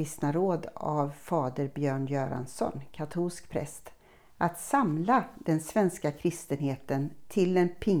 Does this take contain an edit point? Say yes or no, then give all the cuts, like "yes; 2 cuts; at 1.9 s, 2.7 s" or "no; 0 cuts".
no; 0 cuts